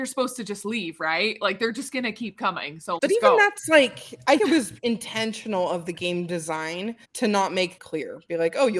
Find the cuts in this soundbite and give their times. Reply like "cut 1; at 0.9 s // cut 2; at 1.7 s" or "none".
cut 1; at 3.0 s // cut 2; at 4.4 s // cut 3; at 7.0 s // cut 4; at 7.8 s